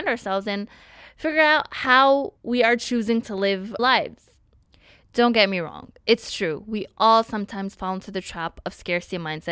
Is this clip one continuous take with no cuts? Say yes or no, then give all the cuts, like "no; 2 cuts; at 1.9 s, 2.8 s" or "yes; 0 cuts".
no; 2 cuts; at 2.4 s, 3.8 s